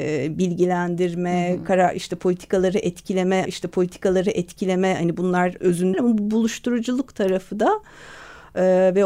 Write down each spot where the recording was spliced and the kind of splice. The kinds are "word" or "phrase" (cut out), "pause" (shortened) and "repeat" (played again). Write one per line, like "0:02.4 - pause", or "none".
0:03.4 - repeat
0:05.6 - word
0:05.9 - phrase